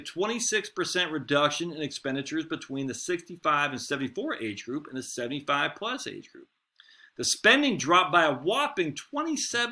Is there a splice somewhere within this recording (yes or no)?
no